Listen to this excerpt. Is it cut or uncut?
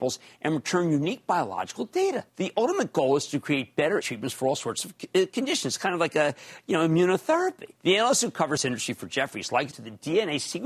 cut